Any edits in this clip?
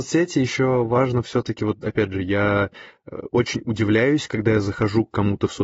no; 0 cuts

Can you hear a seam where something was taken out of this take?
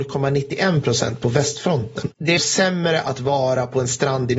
yes; 1 cut; at 2.4 s

